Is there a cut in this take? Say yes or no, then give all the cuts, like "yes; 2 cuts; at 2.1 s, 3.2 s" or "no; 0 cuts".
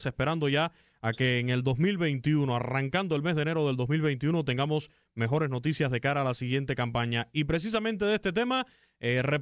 no; 0 cuts